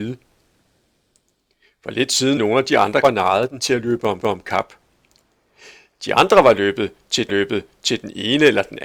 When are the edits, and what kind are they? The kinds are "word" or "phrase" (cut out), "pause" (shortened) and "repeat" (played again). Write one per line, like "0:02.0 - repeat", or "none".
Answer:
0:02.4 - word
0:03.0 - word
0:04.2 - repeat
0:07.3 - repeat